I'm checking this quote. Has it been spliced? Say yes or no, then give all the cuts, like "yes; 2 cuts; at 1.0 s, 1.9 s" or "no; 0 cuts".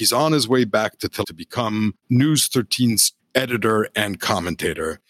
yes; 3 cuts; at 1.2 s, 2.0 s, 3.2 s